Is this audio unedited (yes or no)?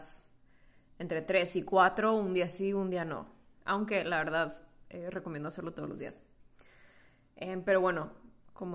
yes